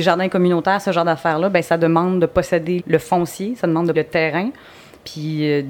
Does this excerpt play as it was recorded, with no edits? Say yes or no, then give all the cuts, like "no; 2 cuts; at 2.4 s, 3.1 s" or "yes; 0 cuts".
no; 2 cuts; at 2.8 s, 3.9 s